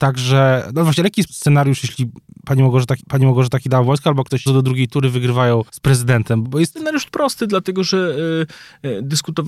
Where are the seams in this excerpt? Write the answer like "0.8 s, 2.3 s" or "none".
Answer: 1.3 s, 3.0 s, 4.5 s, 5.7 s, 6.4 s, 7.1 s

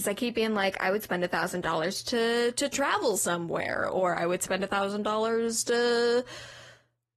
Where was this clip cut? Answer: none

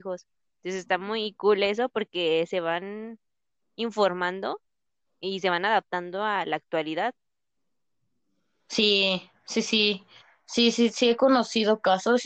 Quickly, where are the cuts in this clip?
none

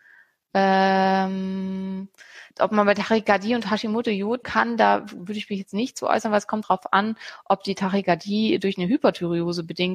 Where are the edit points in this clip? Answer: 2.5 s, 4.4 s, 6.6 s

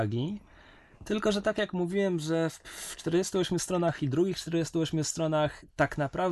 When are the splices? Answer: none

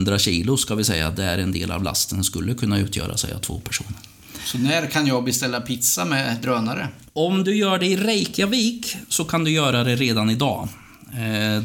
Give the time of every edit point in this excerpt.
none

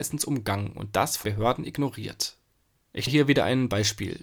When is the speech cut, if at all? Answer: 1.2 s, 3.1 s

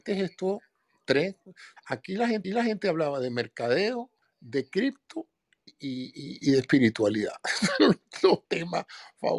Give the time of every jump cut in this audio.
1.8 s, 2.4 s, 4.2 s, 5.7 s, 6.4 s, 8.4 s

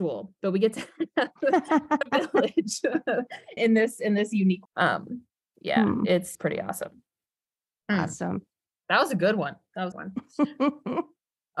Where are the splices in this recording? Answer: 3.6 s, 4.7 s, 6.3 s, 9.9 s

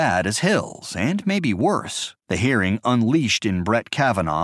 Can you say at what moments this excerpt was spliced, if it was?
2.2 s

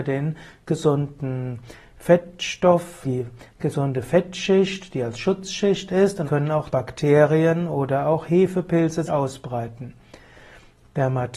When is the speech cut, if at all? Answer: 3.0 s, 6.2 s, 6.7 s, 9.1 s

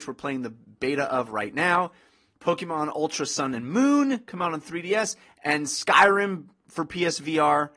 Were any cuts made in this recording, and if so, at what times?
none

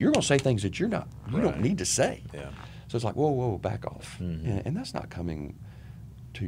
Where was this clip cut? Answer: none

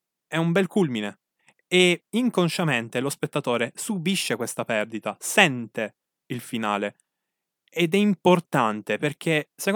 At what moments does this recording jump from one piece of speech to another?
none

